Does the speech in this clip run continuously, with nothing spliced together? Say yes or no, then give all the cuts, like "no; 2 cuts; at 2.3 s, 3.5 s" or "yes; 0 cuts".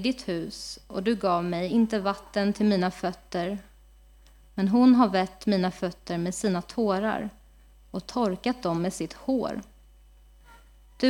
yes; 0 cuts